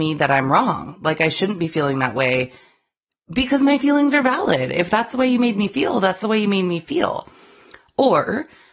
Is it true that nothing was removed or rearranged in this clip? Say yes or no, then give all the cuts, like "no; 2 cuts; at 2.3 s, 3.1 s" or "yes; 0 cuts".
yes; 0 cuts